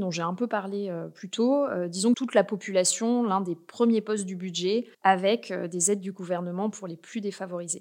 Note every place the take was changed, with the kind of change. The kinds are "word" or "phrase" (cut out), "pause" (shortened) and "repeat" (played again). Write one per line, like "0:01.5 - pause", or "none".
0:02.1 - phrase
0:04.9 - pause